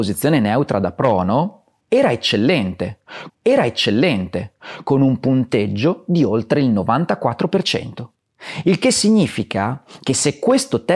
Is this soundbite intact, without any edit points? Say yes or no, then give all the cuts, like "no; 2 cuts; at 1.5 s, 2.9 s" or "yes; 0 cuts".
no; 1 cut; at 3.3 s